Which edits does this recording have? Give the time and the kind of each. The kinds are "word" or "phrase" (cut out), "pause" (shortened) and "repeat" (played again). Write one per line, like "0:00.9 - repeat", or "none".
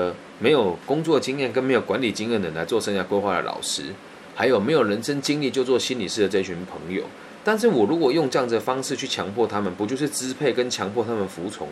none